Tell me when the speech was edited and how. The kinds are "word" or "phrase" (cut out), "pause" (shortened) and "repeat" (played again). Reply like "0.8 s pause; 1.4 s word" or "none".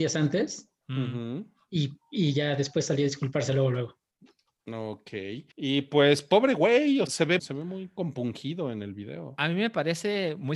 5.5 s pause; 7.1 s word; 7.4 s word